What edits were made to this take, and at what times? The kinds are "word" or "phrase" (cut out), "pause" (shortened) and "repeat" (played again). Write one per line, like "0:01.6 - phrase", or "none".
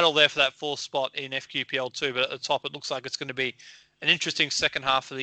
none

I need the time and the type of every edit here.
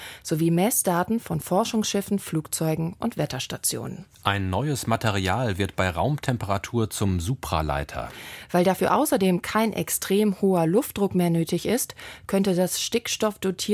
0:04.1 - pause

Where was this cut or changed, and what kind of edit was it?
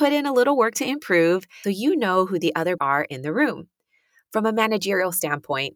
0:01.6 - phrase
0:02.8 - word

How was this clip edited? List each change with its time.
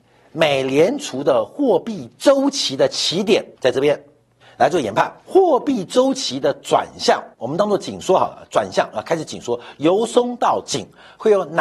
0:03.5 - pause
0:04.4 - pause
0:05.2 - pause
0:07.3 - pause

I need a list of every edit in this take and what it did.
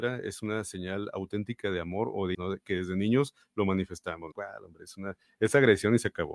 0:02.3 - word
0:04.3 - word

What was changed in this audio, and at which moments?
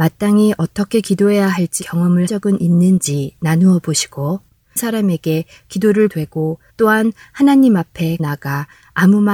0:01.8 - word
0:02.3 - word
0:04.8 - word
0:06.1 - word
0:06.7 - pause
0:08.2 - word

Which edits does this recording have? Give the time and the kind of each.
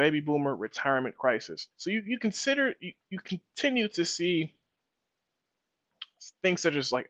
0:01.7 - pause
0:03.0 - pause

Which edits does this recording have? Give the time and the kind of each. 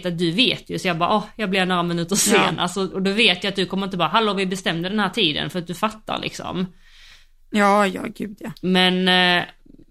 none

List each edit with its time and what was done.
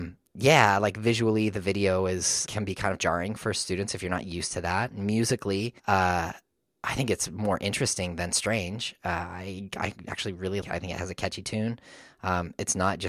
0:02.5 - word
0:05.8 - pause
0:10.6 - word

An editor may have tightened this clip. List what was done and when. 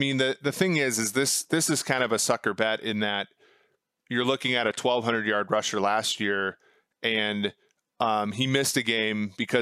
none

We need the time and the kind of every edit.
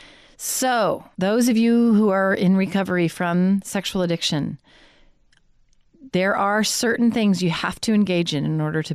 0:01.1 - pause

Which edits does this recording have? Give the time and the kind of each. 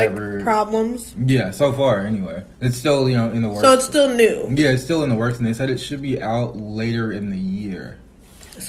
0:02.5 - pause

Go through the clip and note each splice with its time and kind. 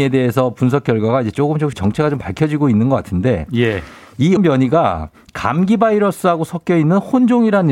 0:01.7 - word
0:04.4 - word

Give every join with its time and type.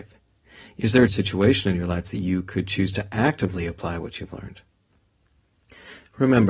0:01.1 - word

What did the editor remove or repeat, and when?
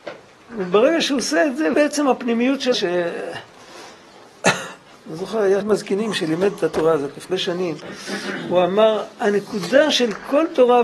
0:01.7 - word
0:02.7 - word
0:05.6 - word
0:07.3 - word

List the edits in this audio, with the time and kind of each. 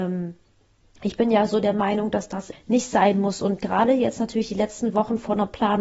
0:02.5 - word

